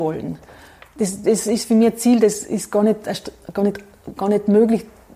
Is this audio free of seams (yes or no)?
yes